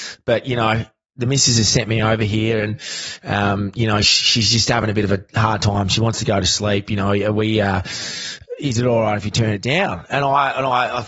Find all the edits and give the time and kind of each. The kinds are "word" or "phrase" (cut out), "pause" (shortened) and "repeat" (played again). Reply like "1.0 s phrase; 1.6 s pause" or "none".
none

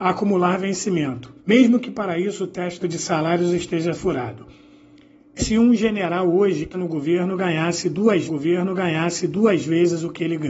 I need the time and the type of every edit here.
1.4 s pause; 2.8 s phrase; 4.0 s word; 5.4 s word; 6.7 s word; 8.3 s repeat

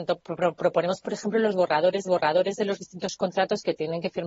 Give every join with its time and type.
2.0 s repeat

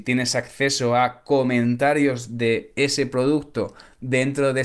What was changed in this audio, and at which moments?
none

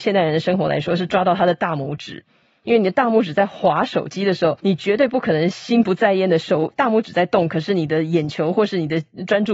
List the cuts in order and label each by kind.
4.6 s pause

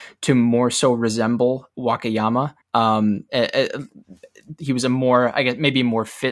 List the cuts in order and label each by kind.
1.7 s word; 2.6 s pause; 4.6 s word

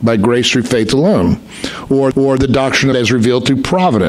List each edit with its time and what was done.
2.1 s repeat; 2.9 s phrase

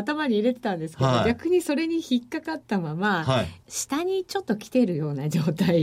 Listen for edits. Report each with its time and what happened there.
3.6 s word

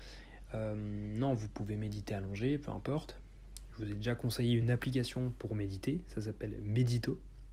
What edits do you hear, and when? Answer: none

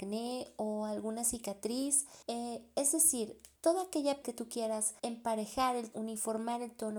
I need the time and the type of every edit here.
2.2 s pause; 3.6 s pause; 4.2 s word; 5.0 s pause; 5.9 s word

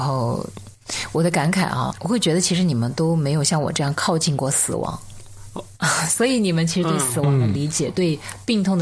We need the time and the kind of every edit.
1.9 s word

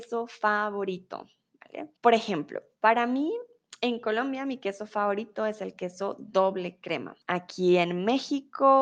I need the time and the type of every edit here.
2.0 s pause; 7.2 s pause

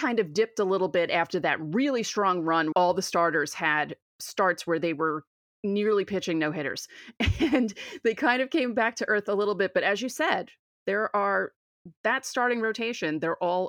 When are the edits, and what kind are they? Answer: 2.7 s word

